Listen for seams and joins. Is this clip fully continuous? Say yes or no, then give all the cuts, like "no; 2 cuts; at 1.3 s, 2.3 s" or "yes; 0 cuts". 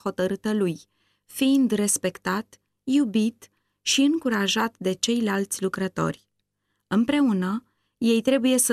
yes; 0 cuts